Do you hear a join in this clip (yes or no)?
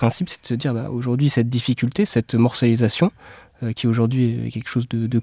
no